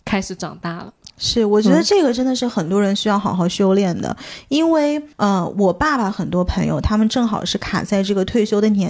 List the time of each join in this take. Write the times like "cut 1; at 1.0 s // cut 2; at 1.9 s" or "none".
cut 1; at 5.1 s